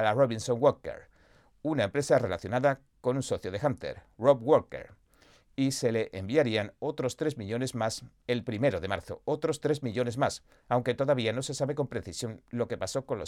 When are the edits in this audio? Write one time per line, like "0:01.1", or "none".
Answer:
none